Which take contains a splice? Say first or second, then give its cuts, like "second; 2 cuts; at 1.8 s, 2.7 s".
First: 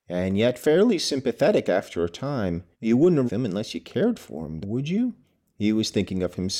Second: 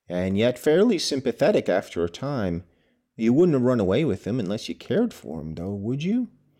first; 4 cuts; at 2.7 s, 3.3 s, 4.6 s, 5.2 s